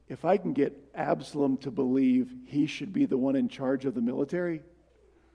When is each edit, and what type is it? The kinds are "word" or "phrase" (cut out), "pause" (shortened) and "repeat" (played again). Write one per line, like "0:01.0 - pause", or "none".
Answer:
none